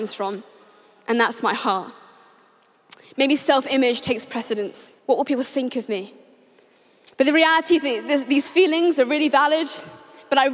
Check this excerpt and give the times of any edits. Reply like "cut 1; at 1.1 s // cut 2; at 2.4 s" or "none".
cut 1; at 5.0 s // cut 2; at 7.1 s